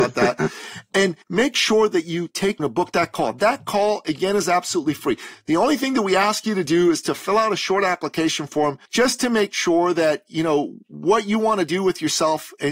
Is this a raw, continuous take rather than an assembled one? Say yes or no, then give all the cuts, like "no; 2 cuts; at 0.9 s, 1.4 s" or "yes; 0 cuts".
no; 3 cuts; at 1.2 s, 2.6 s, 8.8 s